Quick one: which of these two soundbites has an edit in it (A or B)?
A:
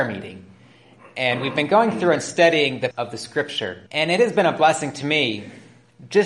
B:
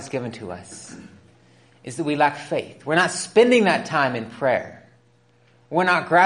A